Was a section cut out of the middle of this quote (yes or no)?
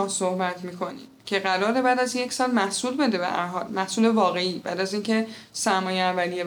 no